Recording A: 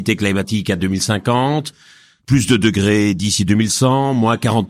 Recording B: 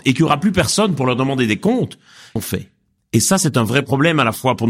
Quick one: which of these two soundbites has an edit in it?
B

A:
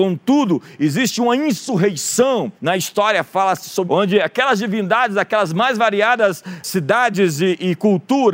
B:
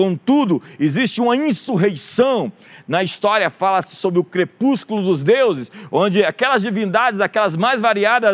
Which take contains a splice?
A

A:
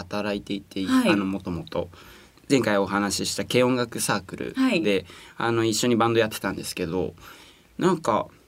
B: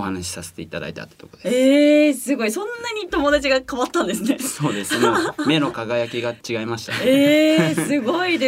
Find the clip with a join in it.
B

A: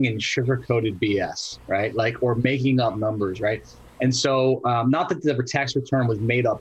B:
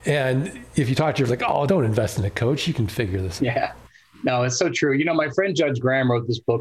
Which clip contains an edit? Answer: B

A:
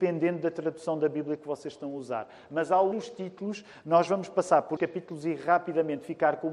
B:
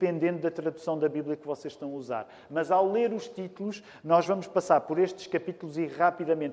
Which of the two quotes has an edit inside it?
A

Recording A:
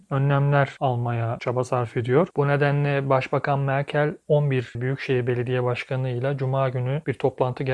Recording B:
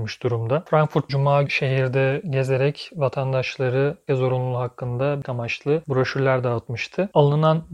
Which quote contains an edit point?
B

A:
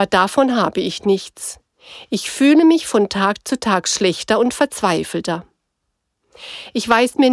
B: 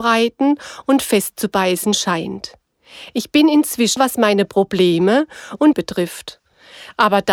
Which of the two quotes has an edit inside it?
B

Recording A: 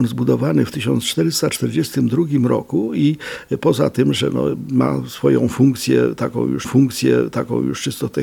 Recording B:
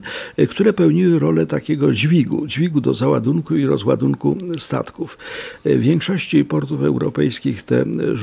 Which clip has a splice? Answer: A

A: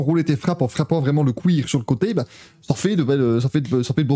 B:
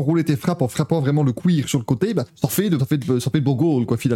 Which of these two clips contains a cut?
B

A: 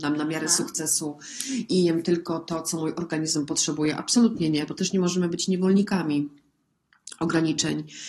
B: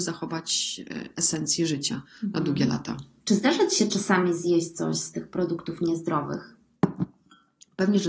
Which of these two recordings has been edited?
B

